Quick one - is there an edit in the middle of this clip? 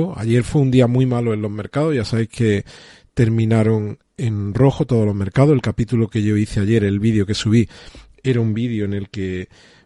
no; 0 cuts

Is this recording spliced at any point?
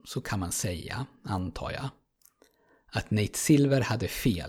no; 0 cuts

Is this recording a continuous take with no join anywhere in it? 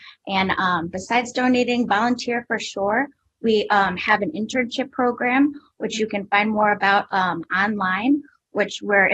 yes; 0 cuts

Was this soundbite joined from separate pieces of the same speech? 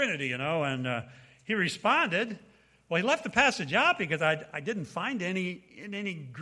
no; 0 cuts

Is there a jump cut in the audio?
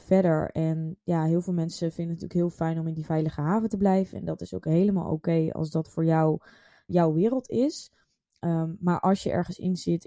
yes; 1 cut; at 6.9 s

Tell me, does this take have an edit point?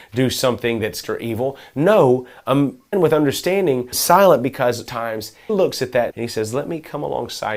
yes; 6 cuts; at 1.0 s, 2.9 s, 3.9 s, 4.9 s, 5.5 s, 6.1 s

